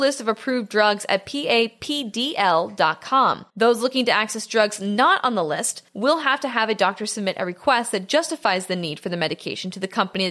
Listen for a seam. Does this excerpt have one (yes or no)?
yes